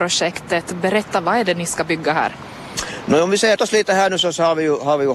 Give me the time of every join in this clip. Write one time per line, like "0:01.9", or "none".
0:03.6